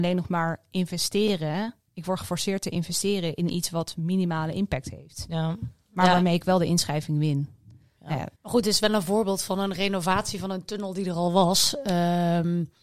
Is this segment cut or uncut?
cut